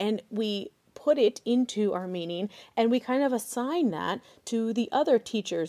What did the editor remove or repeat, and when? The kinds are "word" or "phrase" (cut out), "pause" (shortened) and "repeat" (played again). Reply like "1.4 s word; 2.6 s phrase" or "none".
none